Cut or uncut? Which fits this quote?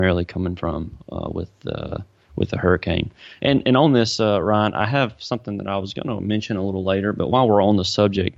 cut